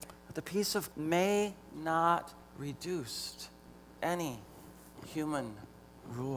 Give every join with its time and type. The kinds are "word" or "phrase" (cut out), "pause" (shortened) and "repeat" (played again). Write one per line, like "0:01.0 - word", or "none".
0:00.9 - word
0:02.5 - word
0:04.0 - word